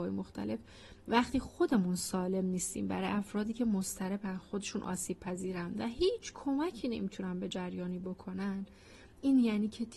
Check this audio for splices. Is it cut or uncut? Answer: uncut